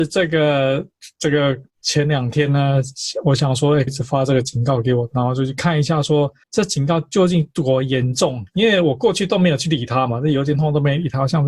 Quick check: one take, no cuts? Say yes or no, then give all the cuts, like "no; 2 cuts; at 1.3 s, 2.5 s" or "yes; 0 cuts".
no; 3 cuts; at 1.7 s, 3.9 s, 6.4 s